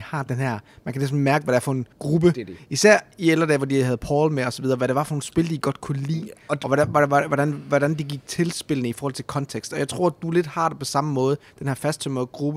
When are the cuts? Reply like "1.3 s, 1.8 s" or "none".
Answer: 1.9 s

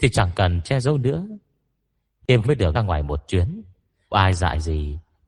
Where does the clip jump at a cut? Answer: 2.4 s, 2.7 s, 4.1 s

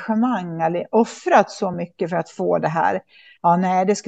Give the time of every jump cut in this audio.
none

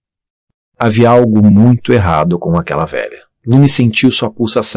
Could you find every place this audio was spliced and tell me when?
none

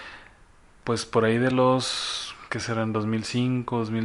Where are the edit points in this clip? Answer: none

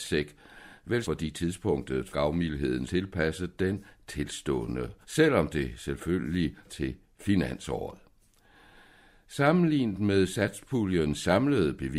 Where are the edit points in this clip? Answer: 1.0 s, 2.1 s, 2.9 s, 5.0 s, 6.6 s

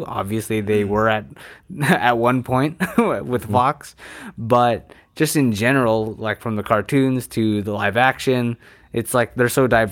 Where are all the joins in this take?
none

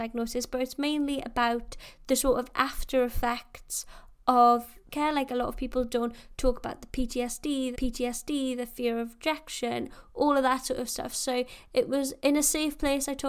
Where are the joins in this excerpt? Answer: 4.9 s, 7.7 s, 12.2 s

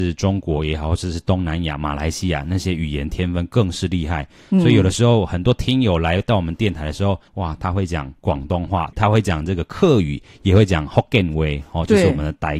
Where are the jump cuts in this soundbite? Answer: 7.3 s, 8.2 s

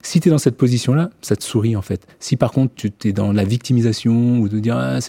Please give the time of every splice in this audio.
2.7 s

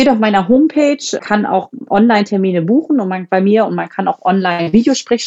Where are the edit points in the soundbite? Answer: 1.2 s

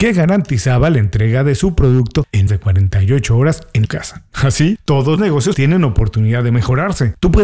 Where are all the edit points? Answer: 2.5 s, 3.9 s, 5.2 s, 5.5 s

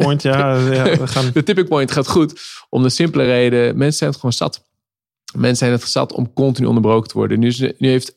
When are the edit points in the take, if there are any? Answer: none

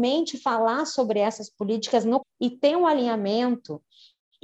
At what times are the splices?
2.2 s

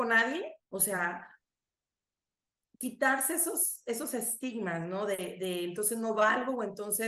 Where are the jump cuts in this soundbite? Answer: none

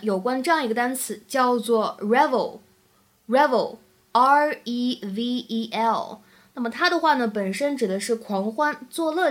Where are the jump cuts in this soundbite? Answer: none

